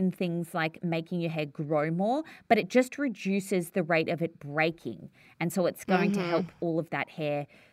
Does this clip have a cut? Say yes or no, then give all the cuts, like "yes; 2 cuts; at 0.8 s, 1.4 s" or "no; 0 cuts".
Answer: no; 0 cuts